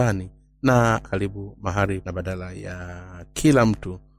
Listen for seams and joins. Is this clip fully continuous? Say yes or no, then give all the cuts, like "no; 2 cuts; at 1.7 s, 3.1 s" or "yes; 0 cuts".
no; 2 cuts; at 1.0 s, 2.0 s